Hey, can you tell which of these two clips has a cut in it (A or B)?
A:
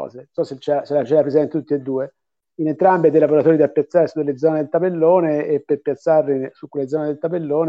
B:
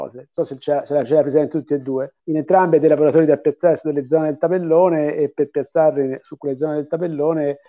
B